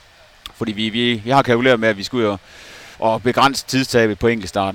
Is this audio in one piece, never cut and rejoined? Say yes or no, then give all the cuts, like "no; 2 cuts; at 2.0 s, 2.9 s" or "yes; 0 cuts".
no; 1 cut; at 2.9 s